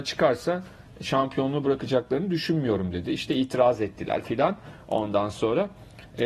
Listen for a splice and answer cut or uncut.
cut